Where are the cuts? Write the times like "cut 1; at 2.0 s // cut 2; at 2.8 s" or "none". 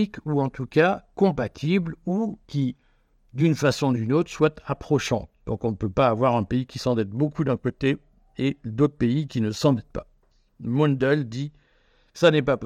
cut 1; at 2.4 s